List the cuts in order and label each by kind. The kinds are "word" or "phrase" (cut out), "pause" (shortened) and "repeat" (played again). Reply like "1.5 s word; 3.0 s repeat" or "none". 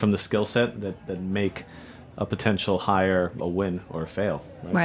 3.4 s word